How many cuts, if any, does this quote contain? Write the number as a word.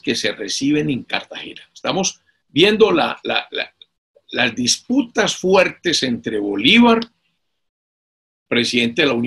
zero